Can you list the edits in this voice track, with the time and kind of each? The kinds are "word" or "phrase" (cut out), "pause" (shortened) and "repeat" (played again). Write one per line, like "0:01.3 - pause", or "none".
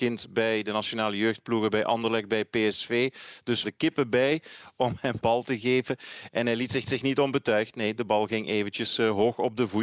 0:03.6 - phrase
0:05.2 - word
0:06.8 - repeat